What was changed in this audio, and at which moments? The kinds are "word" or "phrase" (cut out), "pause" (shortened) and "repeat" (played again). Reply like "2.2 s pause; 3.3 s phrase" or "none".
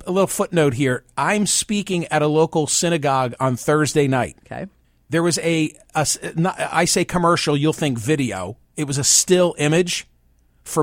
4.8 s pause